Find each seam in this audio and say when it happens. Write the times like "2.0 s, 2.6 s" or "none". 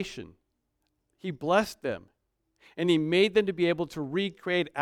none